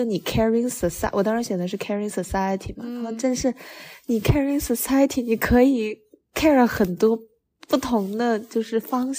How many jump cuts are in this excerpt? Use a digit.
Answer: 0